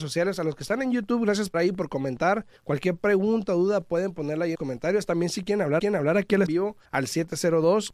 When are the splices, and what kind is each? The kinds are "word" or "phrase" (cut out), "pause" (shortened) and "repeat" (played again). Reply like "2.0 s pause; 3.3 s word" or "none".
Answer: 1.5 s word; 2.6 s pause; 4.5 s phrase; 5.8 s repeat; 6.5 s phrase; 6.9 s pause